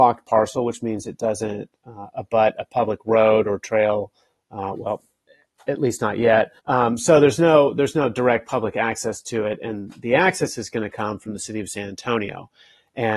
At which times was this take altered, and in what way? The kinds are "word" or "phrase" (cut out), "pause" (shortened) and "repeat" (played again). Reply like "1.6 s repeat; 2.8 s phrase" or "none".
6.6 s pause